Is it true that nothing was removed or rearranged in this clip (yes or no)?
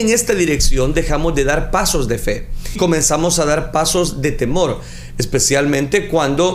no